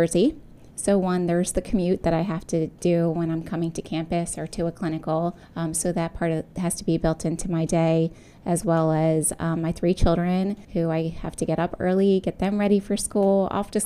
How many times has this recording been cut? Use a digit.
3